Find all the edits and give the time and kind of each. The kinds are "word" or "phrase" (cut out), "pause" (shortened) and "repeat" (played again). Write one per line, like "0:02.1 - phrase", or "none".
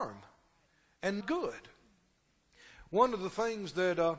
0:01.2 - word